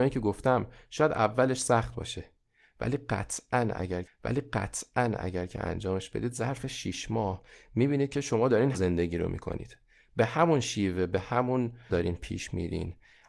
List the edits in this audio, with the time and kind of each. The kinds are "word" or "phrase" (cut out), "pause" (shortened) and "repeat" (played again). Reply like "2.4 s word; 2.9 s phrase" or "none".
4.0 s repeat; 8.7 s word; 11.9 s word